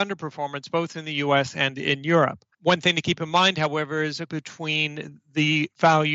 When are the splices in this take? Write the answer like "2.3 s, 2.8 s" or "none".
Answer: 2.5 s, 4.3 s